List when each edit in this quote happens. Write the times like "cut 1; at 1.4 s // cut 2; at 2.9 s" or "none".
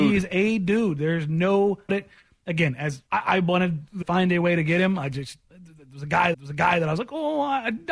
cut 1; at 1.9 s // cut 2; at 3.1 s // cut 3; at 4.0 s // cut 4; at 5.4 s // cut 5; at 6.3 s